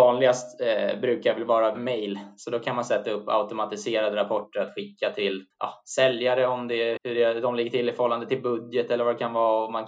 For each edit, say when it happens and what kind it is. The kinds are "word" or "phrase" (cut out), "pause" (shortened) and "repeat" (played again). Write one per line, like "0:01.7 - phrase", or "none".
0:01.7 - word
0:05.5 - pause
0:07.0 - word